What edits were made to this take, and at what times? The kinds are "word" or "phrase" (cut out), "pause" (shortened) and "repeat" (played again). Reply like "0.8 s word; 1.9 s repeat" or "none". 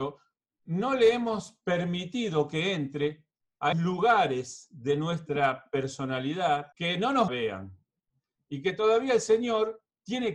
3.7 s word; 6.7 s pause; 7.3 s phrase